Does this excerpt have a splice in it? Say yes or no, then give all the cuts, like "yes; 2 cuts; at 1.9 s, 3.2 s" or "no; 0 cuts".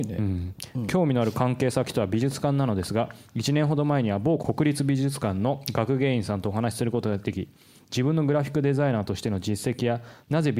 no; 0 cuts